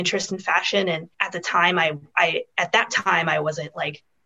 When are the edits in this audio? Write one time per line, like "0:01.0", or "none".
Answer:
0:01.1